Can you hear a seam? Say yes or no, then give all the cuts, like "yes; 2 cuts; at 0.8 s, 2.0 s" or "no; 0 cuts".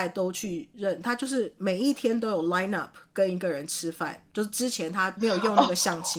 no; 0 cuts